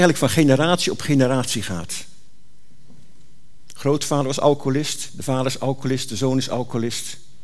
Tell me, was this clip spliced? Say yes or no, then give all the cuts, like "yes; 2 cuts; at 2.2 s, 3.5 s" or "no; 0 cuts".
no; 0 cuts